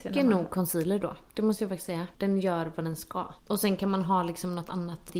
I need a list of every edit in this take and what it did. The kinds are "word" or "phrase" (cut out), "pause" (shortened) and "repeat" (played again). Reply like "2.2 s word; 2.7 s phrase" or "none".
1.3 s pause; 3.4 s pause